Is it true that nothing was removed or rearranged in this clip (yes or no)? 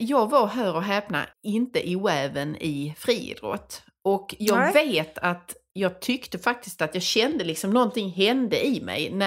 no